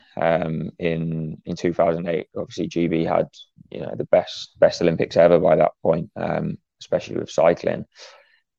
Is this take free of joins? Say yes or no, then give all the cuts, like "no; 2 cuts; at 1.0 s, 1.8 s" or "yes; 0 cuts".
yes; 0 cuts